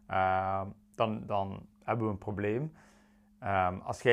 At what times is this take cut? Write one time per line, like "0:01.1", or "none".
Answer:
0:01.7